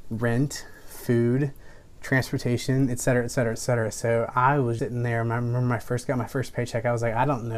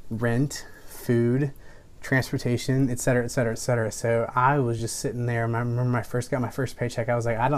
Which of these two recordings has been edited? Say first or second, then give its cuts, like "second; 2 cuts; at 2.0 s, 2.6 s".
first; 1 cut; at 4.8 s